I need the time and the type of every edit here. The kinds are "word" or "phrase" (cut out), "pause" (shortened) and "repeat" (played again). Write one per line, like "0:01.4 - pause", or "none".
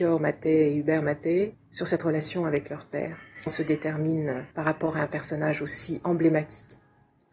0:01.5 - word
0:03.5 - phrase
0:04.5 - pause